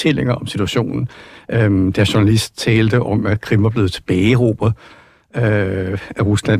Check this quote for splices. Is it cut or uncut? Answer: uncut